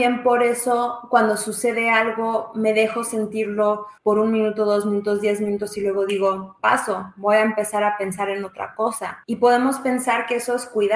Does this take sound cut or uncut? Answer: cut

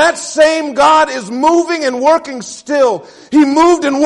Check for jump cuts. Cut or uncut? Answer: uncut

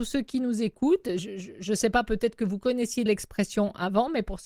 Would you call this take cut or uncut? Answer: cut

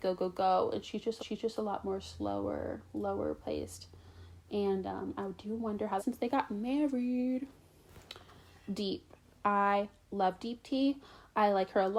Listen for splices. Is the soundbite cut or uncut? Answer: cut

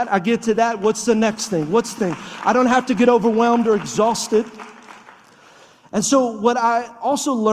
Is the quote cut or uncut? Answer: cut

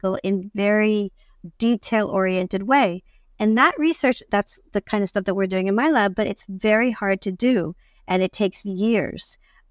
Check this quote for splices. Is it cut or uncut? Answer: uncut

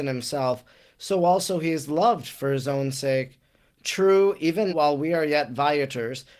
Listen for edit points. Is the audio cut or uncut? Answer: cut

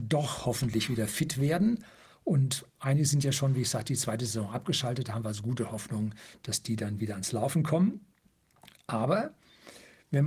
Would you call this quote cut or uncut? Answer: uncut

